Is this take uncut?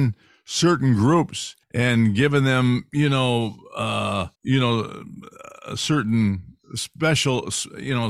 no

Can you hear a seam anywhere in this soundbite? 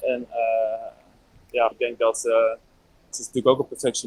yes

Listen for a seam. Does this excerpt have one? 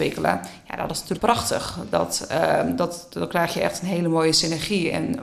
yes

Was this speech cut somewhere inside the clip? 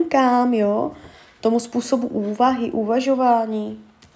no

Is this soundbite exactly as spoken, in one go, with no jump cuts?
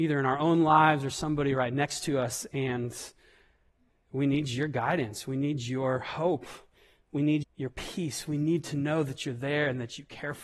no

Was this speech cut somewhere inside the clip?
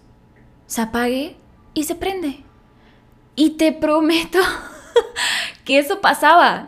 no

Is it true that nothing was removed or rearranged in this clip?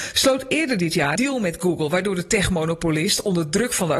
no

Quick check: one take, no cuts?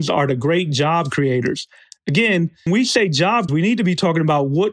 no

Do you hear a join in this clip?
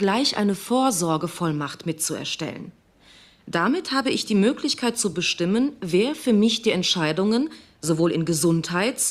no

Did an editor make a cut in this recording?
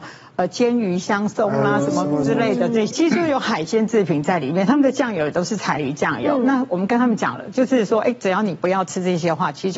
no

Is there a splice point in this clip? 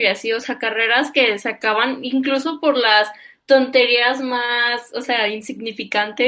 no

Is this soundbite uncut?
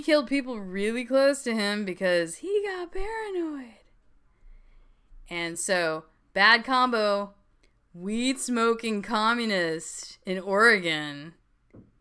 yes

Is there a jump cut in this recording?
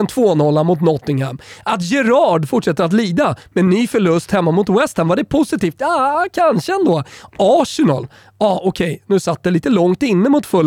no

